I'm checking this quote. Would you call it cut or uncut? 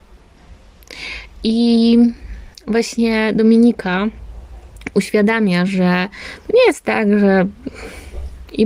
uncut